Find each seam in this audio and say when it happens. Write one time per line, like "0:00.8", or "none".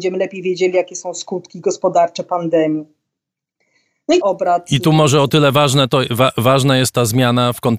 0:04.2